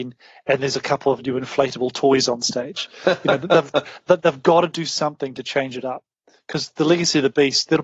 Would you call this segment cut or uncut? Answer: uncut